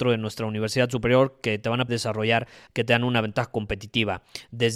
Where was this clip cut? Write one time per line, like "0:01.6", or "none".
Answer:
0:01.9
0:02.7